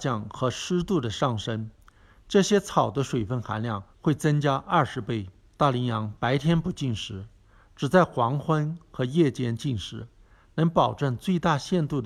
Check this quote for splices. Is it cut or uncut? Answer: cut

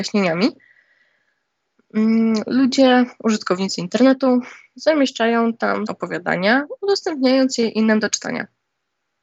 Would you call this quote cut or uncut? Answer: cut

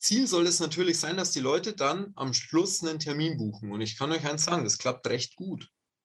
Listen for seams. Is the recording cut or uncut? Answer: uncut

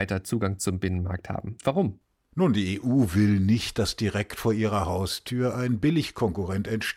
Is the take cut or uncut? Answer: uncut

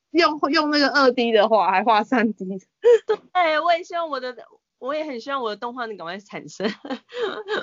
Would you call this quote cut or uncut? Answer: uncut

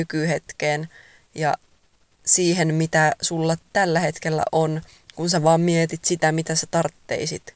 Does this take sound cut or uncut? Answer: uncut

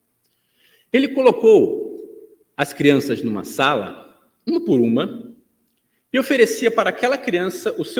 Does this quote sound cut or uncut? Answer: uncut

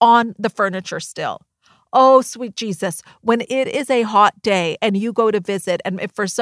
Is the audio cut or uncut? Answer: uncut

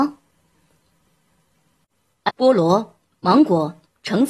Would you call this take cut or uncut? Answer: cut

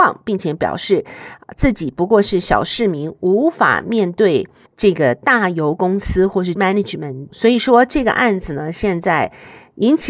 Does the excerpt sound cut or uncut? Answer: cut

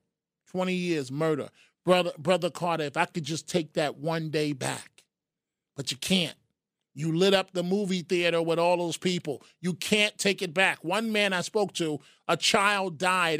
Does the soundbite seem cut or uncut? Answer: uncut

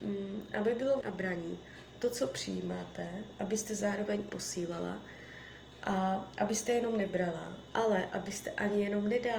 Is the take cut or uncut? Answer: cut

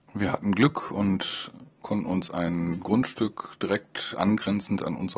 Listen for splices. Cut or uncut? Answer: uncut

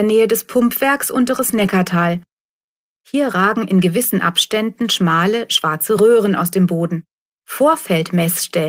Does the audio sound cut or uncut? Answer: uncut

